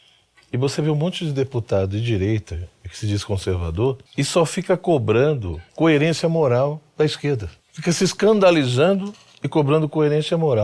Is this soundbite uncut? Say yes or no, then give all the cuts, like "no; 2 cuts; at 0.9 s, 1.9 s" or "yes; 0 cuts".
no; 3 cuts; at 4.1 s, 5.7 s, 7.6 s